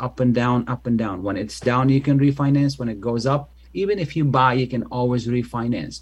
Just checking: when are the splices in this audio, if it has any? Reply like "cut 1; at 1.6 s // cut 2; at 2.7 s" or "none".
none